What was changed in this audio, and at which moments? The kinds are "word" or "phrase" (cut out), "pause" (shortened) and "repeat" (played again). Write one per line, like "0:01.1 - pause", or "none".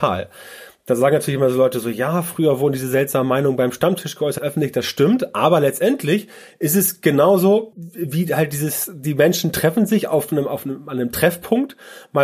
0:04.4 - word
0:07.7 - word